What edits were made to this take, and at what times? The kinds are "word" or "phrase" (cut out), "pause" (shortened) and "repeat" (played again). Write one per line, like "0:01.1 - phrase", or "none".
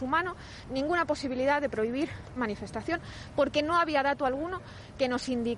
0:02.4 - word